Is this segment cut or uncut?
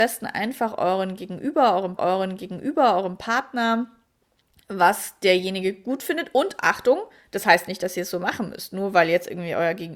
cut